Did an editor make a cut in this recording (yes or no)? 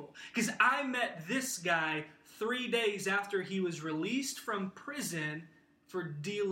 no